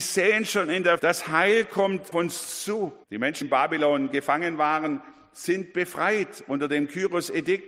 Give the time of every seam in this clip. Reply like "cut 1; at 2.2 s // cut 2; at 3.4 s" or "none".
cut 1; at 1.0 s // cut 2; at 2.1 s // cut 3; at 3.0 s // cut 4; at 3.4 s